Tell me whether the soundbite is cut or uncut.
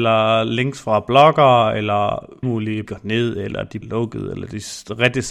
cut